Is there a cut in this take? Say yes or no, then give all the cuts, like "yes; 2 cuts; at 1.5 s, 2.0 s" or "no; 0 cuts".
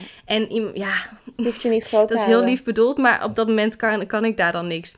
no; 0 cuts